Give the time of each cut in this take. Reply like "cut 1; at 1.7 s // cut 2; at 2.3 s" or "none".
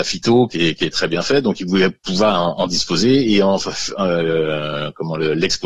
none